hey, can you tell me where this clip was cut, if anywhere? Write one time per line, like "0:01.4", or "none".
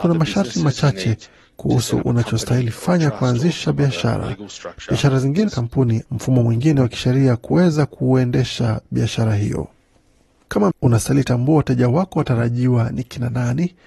0:05.5
0:06.0
0:10.7